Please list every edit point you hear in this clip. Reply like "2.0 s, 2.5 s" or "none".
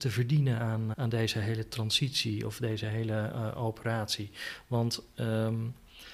0.9 s